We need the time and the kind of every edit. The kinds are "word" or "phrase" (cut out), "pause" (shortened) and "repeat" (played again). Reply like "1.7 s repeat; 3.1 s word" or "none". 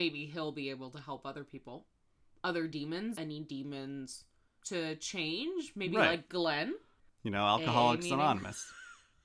3.1 s word; 4.6 s word